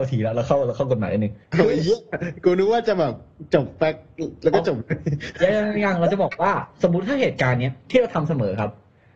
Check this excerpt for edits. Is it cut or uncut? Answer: cut